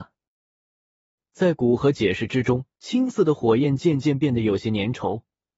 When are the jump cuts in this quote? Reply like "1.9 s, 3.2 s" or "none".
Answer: 2.7 s